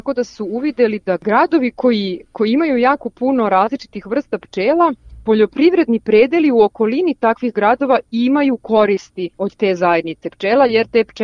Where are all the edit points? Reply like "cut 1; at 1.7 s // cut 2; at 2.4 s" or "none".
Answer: cut 1; at 9.3 s